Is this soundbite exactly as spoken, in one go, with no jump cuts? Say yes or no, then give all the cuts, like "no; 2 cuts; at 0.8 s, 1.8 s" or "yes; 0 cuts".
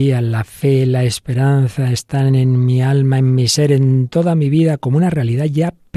yes; 0 cuts